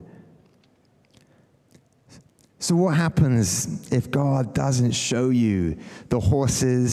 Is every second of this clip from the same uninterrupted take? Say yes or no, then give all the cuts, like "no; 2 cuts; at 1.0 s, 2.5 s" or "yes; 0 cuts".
yes; 0 cuts